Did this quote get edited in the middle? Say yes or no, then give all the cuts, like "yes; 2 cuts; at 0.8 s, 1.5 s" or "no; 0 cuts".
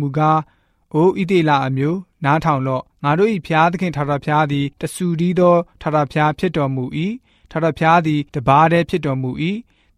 yes; 3 cuts; at 2.9 s, 4.7 s, 8.3 s